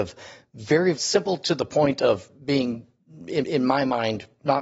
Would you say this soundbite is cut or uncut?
cut